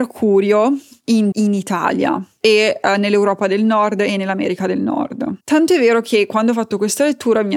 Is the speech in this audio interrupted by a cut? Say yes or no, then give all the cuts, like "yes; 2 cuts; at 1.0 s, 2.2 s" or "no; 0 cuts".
yes; 2 cuts; at 1.3 s, 5.4 s